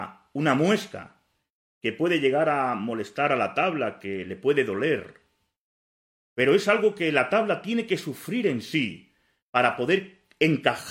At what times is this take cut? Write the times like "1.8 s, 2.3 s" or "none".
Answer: none